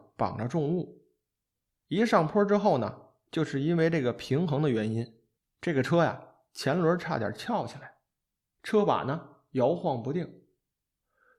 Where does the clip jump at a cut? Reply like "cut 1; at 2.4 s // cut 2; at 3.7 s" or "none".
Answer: none